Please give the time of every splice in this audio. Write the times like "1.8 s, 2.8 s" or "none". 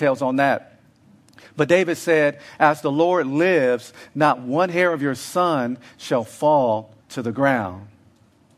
7.0 s

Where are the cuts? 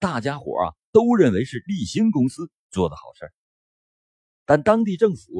none

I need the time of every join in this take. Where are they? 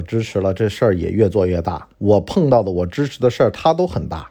1.9 s

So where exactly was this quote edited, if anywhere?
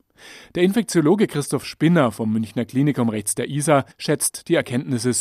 3.9 s

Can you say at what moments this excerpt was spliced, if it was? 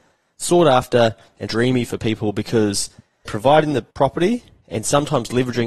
1.5 s, 3.3 s, 3.9 s

